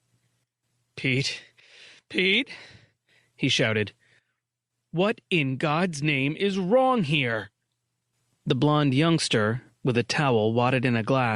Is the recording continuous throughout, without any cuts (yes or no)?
yes